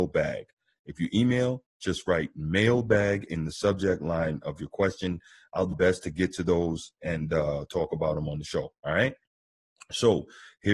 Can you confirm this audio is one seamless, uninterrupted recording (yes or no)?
no